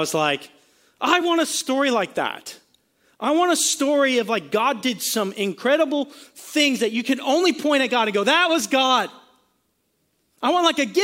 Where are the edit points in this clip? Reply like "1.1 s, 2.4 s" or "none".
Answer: none

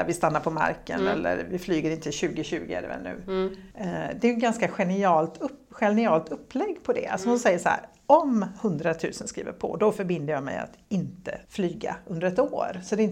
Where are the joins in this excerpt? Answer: 3.7 s, 11.4 s

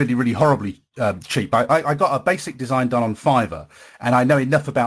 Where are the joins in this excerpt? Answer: none

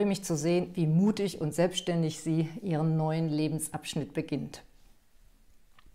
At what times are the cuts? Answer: none

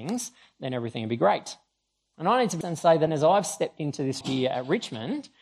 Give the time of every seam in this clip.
2.6 s, 3.1 s, 4.2 s

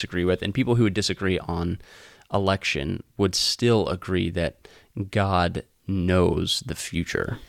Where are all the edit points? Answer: none

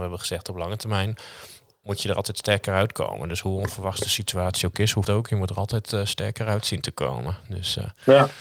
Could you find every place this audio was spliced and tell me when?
5.0 s

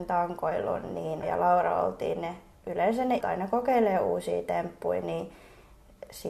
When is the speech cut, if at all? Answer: 1.2 s, 3.2 s

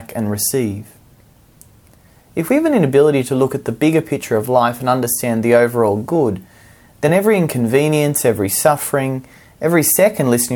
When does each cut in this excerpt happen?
none

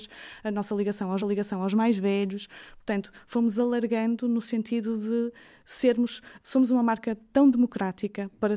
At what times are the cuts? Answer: 1.2 s

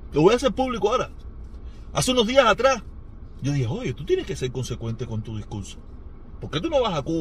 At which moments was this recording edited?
none

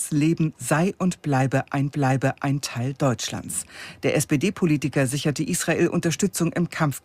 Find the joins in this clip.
1.9 s

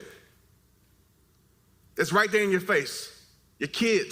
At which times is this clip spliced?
none

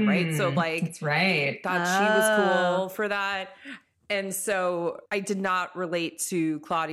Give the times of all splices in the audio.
5.1 s

